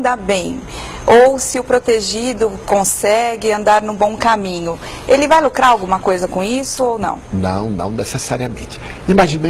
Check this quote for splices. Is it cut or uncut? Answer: uncut